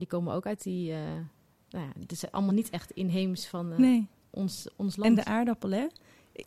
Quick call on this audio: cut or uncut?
uncut